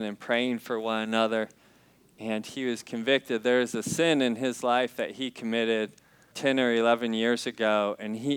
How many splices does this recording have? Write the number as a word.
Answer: one